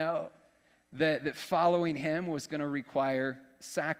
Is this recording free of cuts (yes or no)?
yes